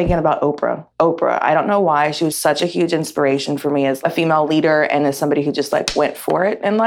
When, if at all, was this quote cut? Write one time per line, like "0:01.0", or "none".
0:00.9
0:02.3